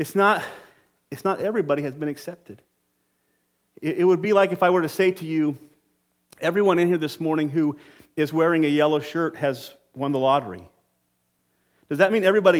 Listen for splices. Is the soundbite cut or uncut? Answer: uncut